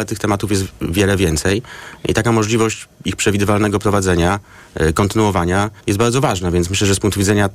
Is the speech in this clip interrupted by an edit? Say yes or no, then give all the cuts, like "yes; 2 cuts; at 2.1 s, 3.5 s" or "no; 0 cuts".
yes; 1 cut; at 5.8 s